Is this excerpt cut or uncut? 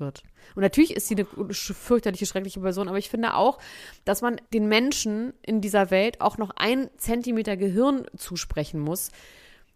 cut